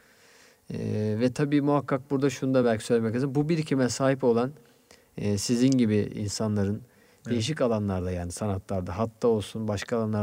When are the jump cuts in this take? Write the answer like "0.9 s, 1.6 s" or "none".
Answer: none

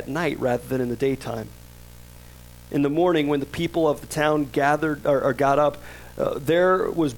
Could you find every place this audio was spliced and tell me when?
none

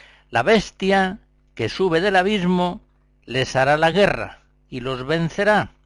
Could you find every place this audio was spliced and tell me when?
none

